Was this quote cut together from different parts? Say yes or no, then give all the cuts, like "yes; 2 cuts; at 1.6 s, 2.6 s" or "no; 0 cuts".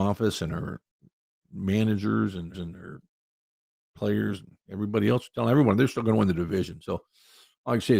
yes; 1 cut; at 2.5 s